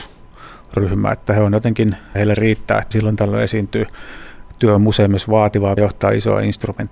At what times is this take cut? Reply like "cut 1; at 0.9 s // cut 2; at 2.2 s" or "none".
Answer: cut 1; at 2.1 s // cut 2; at 2.9 s // cut 3; at 5.8 s